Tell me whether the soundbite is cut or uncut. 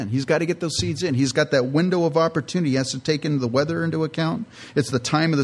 uncut